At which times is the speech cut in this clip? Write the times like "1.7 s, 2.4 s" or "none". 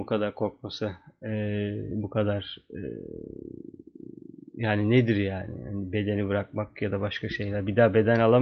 none